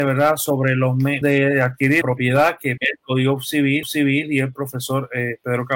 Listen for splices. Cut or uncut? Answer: cut